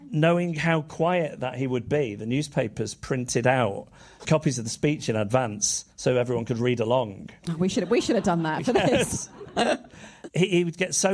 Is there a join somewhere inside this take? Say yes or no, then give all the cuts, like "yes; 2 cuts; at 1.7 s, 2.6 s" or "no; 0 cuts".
yes; 2 cuts; at 4.2 s, 5.9 s